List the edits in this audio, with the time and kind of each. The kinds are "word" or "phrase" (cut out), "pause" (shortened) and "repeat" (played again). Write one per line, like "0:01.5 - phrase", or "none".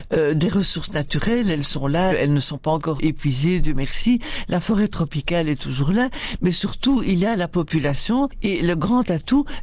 0:02.1 - word
0:03.0 - word